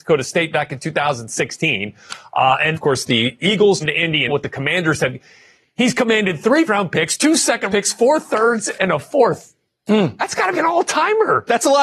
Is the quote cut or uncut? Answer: cut